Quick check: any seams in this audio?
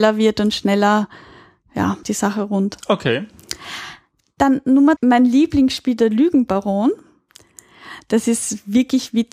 yes; 2 cuts; at 2.0 s, 5.0 s

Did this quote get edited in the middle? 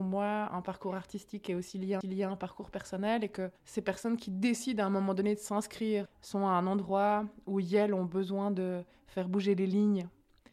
yes; 3 cuts; at 2.0 s, 3.6 s, 6.1 s

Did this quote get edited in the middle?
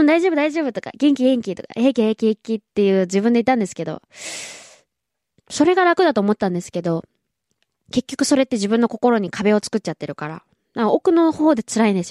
no; 0 cuts

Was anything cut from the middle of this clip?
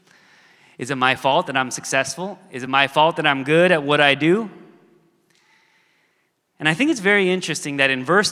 no; 0 cuts

